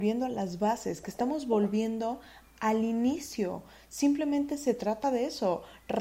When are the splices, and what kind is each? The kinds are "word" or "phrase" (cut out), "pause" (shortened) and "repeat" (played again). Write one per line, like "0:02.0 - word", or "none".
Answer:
none